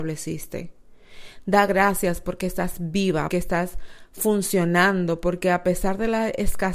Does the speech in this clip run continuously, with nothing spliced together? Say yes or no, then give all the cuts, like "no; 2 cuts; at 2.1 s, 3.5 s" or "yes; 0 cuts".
no; 1 cut; at 3.3 s